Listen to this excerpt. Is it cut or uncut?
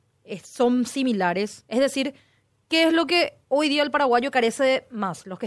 uncut